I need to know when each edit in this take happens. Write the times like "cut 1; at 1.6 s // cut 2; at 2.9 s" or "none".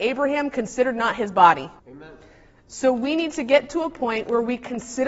cut 1; at 1.8 s

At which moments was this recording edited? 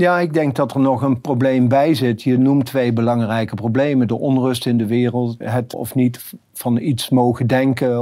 cut 1; at 5.4 s // cut 2; at 5.7 s

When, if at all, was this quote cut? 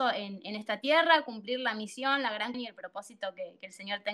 cut 1; at 2.5 s

